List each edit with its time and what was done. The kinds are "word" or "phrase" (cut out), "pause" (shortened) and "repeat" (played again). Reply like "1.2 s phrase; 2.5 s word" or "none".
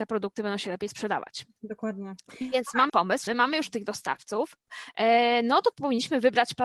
2.9 s word; 3.3 s word; 5.7 s word